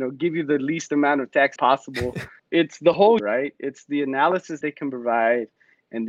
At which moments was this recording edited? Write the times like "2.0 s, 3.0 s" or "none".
1.6 s, 2.4 s, 3.2 s, 4.6 s